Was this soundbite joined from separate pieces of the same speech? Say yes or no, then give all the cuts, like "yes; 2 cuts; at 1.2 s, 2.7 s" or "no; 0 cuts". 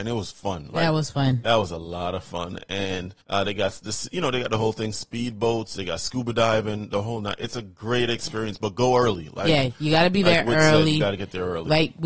yes; 1 cut; at 3.2 s